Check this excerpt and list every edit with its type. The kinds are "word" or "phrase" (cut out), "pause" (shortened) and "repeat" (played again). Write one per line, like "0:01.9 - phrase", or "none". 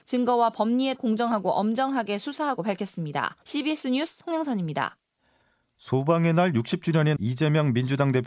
0:01.0 - word
0:02.6 - word
0:03.4 - pause
0:07.2 - word

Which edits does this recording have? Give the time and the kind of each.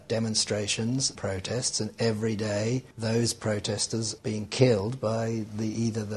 0:01.2 - word
0:02.9 - pause
0:04.2 - word

